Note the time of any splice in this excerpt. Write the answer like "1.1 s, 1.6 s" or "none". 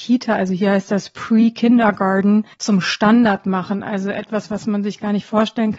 2.5 s